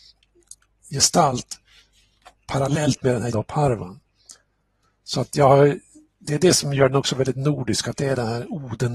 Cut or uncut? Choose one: cut